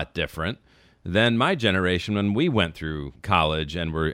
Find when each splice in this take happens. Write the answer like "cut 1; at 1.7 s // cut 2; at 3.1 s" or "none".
cut 1; at 3.2 s